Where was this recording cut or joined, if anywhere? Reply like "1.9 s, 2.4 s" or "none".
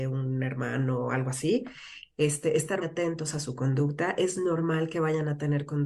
2.8 s